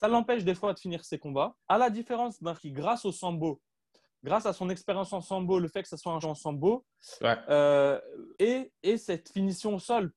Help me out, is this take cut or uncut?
cut